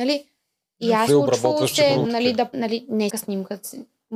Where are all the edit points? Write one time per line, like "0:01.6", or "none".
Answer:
0:01.1
0:02.0
0:02.5
0:03.1